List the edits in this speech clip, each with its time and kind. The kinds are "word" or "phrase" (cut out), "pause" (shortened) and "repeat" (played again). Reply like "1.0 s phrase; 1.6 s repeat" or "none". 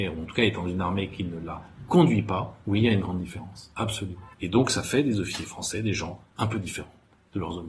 2.6 s pause; 4.3 s pause